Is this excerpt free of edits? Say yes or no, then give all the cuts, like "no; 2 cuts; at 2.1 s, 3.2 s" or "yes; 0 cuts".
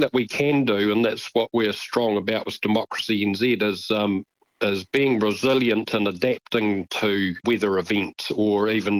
no; 1 cut; at 7.4 s